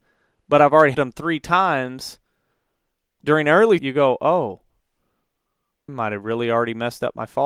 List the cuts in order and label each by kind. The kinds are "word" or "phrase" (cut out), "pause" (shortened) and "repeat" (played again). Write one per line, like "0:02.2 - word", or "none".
0:00.9 - word
0:03.8 - word
0:05.9 - word